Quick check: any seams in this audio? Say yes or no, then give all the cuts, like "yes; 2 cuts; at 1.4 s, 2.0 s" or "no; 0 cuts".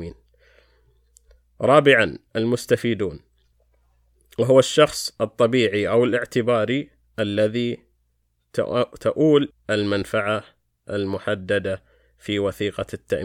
yes; 1 cut; at 9.5 s